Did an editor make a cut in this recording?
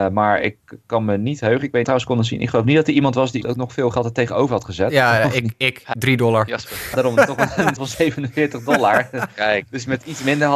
yes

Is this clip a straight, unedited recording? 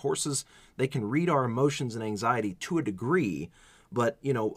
yes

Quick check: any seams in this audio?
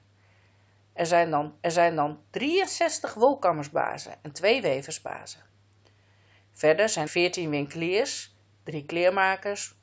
yes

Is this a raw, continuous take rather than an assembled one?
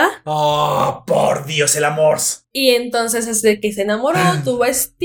yes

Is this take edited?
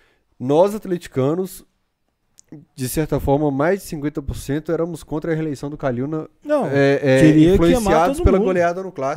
no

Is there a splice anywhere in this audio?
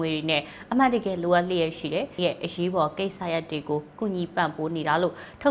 yes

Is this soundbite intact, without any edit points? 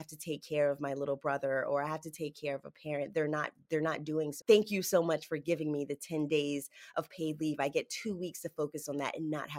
no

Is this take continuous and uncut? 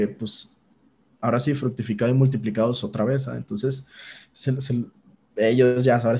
yes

